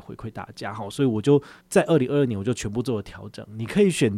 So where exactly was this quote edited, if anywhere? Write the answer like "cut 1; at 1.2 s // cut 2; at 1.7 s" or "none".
cut 1; at 1.6 s

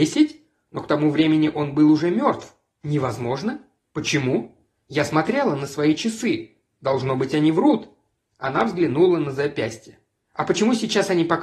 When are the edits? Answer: none

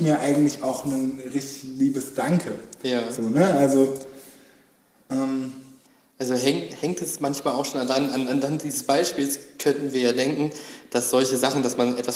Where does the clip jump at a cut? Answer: none

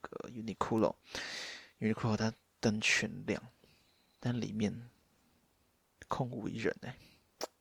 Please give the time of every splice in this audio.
none

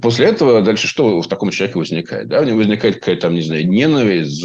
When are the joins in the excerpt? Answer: none

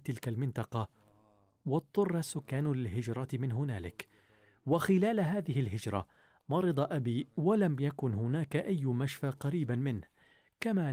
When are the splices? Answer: none

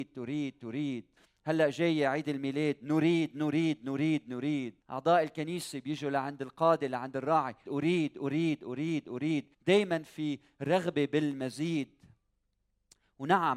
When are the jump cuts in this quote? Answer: cut 1; at 1.2 s // cut 2; at 4.8 s // cut 3; at 7.6 s // cut 4; at 9.5 s

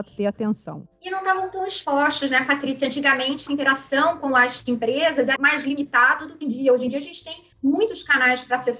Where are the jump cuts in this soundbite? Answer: cut 1; at 3.5 s // cut 2; at 5.4 s // cut 3; at 6.4 s // cut 4; at 7.5 s

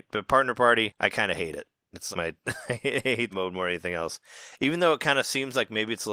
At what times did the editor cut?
cut 1; at 2.1 s // cut 2; at 3.3 s

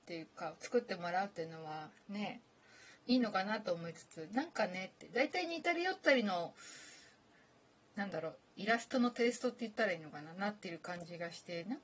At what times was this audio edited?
cut 1; at 3.0 s

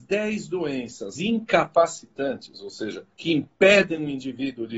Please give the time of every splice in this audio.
cut 1; at 1.2 s // cut 2; at 3.1 s

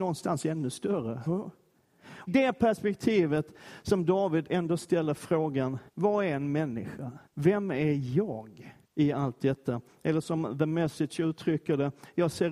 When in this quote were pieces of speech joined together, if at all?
cut 1; at 1.3 s // cut 2; at 2.3 s // cut 3; at 5.9 s // cut 4; at 7.3 s // cut 5; at 8.8 s

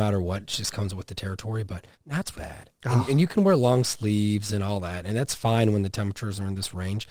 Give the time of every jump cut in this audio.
cut 1; at 1.9 s // cut 2; at 2.3 s

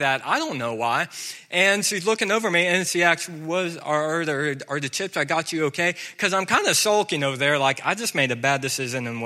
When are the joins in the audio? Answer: none

